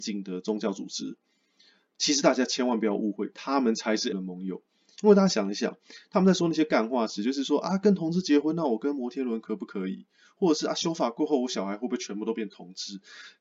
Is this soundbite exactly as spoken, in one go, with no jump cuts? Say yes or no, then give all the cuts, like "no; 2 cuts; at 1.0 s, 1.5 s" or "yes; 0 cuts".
no; 1 cut; at 4.1 s